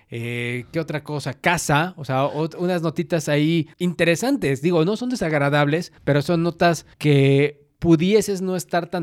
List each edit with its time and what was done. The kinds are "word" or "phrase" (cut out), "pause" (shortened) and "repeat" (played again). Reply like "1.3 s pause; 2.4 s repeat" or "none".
3.7 s pause; 6.0 s pause; 6.9 s pause